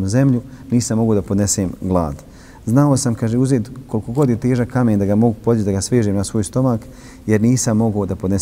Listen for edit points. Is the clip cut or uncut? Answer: uncut